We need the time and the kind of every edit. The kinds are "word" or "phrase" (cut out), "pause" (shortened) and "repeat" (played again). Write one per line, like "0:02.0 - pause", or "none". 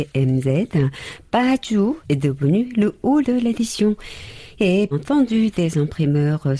0:02.0 - word
0:03.2 - word
0:04.9 - word